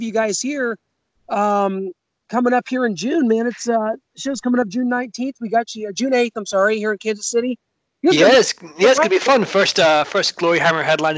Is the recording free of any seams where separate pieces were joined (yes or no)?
yes